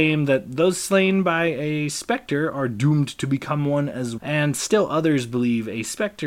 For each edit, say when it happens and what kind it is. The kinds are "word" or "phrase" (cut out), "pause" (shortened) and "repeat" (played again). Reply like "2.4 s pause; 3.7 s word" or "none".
4.2 s word